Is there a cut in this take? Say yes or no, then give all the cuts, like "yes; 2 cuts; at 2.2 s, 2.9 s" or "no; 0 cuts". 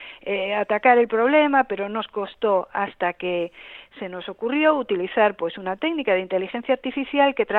no; 0 cuts